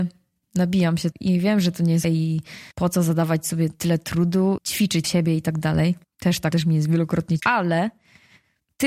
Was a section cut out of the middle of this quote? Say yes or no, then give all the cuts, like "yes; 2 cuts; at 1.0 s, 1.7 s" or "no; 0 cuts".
yes; 8 cuts; at 1.1 s, 2.0 s, 2.7 s, 4.6 s, 5.0 s, 6.0 s, 6.5 s, 7.4 s